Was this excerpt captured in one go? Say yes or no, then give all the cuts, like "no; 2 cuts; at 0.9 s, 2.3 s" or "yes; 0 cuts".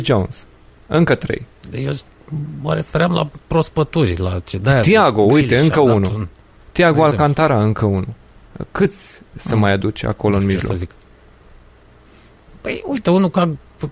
yes; 0 cuts